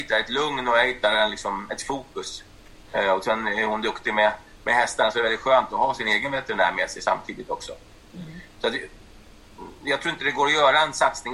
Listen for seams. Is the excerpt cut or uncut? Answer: uncut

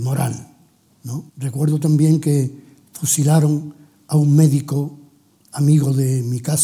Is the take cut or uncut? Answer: cut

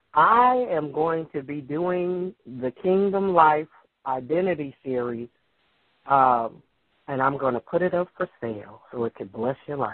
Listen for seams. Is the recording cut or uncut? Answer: uncut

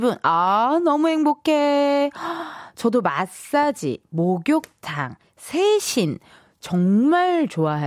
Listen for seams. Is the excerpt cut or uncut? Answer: uncut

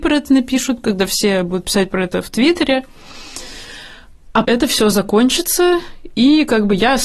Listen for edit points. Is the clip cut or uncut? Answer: cut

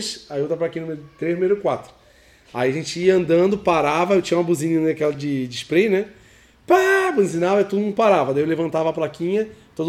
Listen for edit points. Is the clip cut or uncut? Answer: uncut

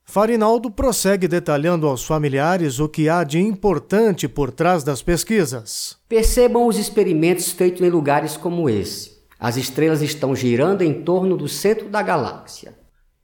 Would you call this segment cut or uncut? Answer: cut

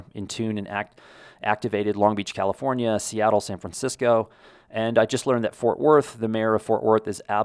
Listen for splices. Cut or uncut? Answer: uncut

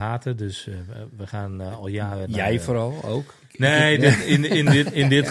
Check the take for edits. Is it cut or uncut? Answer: uncut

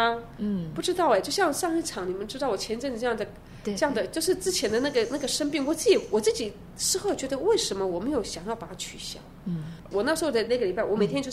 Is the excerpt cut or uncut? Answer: uncut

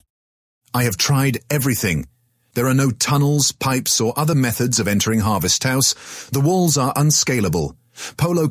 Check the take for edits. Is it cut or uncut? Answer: uncut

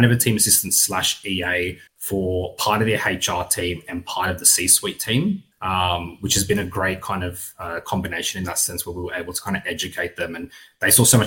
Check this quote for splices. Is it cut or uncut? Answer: cut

